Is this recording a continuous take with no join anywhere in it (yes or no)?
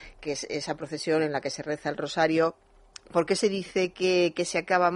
yes